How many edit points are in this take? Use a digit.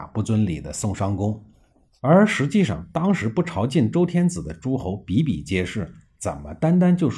0